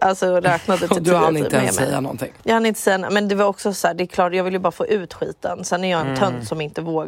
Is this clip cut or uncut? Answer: cut